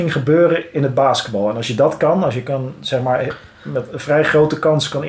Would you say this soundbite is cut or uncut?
uncut